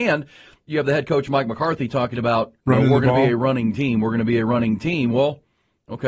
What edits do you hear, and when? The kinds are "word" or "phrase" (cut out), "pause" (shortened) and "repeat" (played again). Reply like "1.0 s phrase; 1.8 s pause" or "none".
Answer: 2.6 s pause